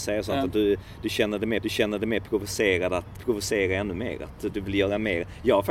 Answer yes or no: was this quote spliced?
yes